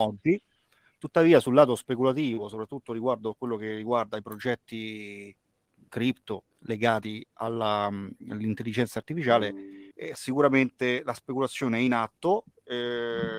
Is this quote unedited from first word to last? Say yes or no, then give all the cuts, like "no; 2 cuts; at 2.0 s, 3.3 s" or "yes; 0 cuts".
no; 2 cuts; at 6.5 s, 9.9 s